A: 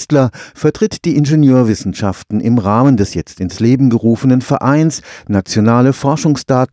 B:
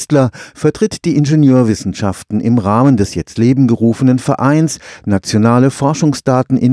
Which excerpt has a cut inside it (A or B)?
B